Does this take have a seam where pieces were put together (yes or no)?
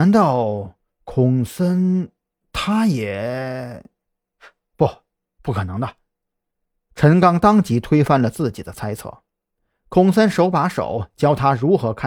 no